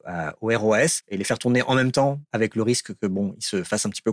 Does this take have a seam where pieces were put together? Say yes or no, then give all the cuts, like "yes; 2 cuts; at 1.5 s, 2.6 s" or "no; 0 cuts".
no; 0 cuts